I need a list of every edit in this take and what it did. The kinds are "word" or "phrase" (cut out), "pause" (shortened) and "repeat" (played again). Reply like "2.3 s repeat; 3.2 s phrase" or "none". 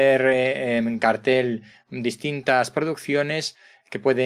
none